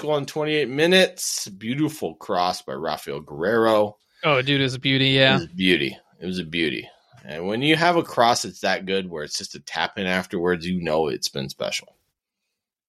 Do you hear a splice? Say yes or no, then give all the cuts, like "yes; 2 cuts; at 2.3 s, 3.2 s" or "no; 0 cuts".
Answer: no; 0 cuts